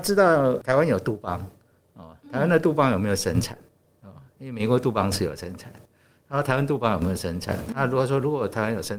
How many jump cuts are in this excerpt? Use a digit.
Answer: 0